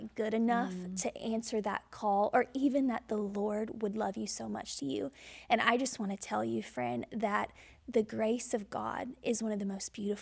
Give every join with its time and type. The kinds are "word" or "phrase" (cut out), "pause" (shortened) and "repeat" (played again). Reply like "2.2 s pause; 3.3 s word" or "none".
4.8 s phrase